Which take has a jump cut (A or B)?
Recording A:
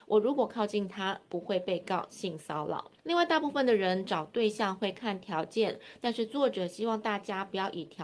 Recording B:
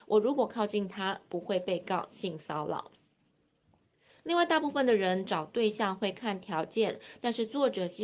A